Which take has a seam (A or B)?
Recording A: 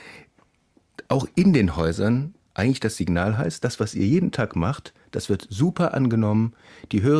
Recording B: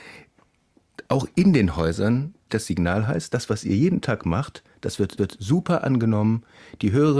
B